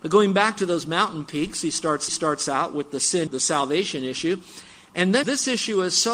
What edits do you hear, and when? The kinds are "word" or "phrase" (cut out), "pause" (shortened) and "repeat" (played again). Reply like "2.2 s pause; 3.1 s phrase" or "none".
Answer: 2.1 s repeat; 3.3 s word; 5.2 s word